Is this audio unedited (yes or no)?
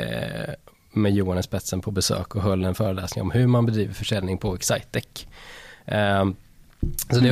yes